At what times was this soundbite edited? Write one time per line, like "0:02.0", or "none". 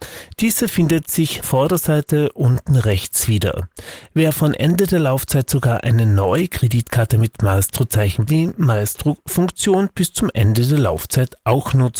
0:01.4
0:08.3